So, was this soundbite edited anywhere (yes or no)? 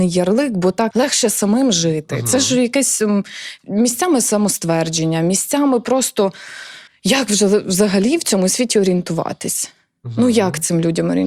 yes